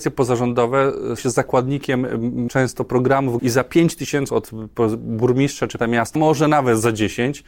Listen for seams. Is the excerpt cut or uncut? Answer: cut